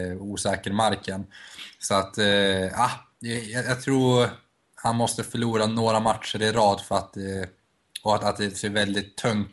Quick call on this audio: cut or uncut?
uncut